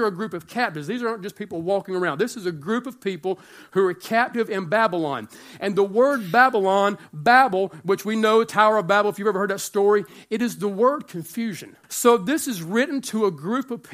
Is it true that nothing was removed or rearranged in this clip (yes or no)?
no